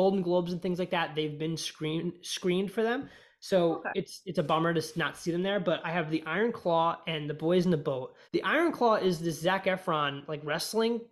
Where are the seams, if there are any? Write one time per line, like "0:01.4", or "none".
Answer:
0:08.2